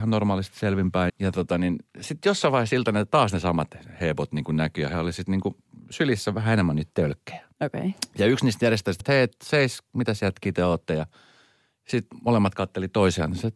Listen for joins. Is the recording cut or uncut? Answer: cut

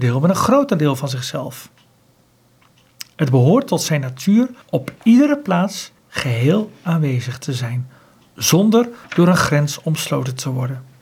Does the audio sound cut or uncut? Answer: cut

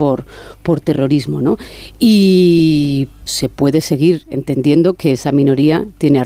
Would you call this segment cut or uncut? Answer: cut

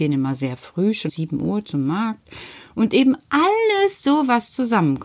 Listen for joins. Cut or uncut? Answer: cut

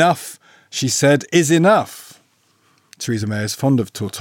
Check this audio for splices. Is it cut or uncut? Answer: uncut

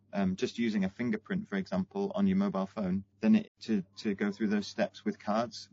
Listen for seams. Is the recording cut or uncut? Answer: cut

